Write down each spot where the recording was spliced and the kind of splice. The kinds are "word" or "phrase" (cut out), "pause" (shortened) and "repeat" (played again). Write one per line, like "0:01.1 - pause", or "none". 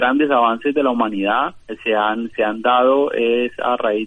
0:01.6 - pause